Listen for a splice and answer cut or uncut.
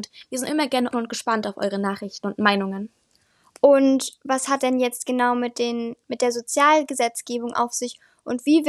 cut